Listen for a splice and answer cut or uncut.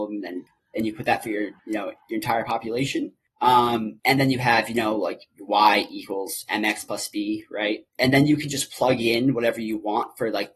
cut